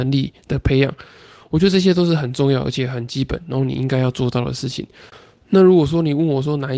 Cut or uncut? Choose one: uncut